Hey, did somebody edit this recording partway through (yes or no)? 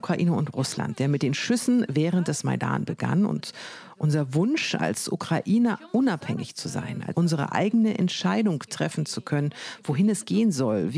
yes